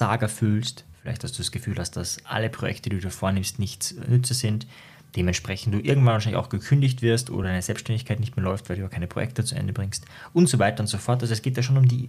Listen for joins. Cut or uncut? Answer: uncut